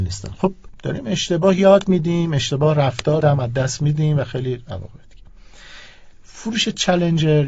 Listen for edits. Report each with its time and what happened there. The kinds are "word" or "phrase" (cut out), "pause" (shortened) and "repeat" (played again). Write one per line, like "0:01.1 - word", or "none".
0:03.2 - phrase